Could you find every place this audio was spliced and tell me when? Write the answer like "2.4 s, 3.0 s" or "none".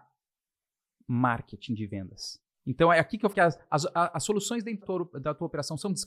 2.5 s, 3.3 s, 4.8 s